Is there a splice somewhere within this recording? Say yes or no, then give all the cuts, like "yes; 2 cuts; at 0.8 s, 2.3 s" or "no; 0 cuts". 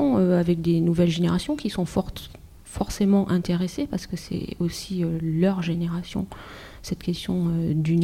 no; 0 cuts